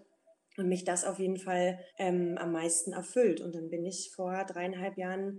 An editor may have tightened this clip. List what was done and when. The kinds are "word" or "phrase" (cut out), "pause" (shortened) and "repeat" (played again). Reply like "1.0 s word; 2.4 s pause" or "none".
1.9 s pause